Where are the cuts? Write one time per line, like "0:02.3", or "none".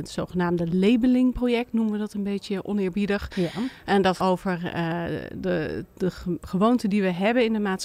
0:04.2